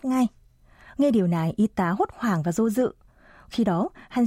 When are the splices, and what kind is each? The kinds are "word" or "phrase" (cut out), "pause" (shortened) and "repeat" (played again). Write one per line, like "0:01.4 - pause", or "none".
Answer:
none